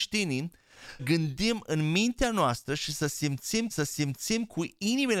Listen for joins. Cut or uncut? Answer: cut